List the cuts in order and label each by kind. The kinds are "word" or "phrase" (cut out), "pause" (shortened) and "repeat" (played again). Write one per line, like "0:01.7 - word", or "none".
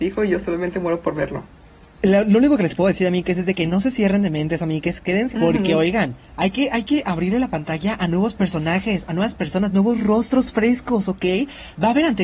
0:05.3 - word